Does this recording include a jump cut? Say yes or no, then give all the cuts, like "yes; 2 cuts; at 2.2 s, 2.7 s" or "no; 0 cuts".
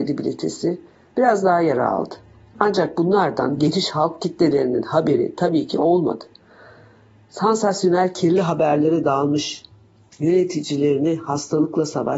no; 0 cuts